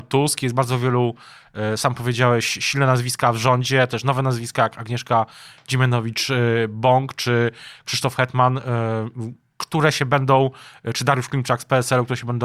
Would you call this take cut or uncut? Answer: uncut